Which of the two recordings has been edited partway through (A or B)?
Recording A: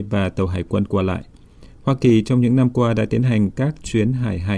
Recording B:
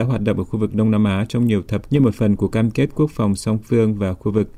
B